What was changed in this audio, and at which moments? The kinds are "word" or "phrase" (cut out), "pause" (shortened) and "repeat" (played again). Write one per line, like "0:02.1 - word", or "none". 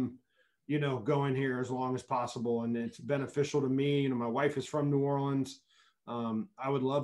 none